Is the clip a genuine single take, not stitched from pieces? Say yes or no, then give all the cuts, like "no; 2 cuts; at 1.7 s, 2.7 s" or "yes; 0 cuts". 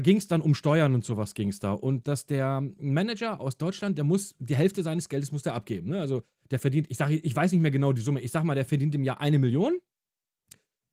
yes; 0 cuts